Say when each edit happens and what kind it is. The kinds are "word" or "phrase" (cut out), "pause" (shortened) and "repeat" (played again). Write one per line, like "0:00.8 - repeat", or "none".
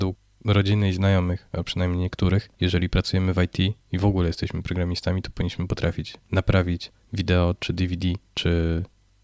0:02.5 - pause
0:03.8 - pause
0:06.2 - pause
0:08.3 - pause